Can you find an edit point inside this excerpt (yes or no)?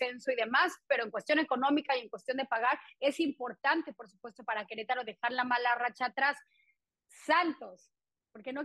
no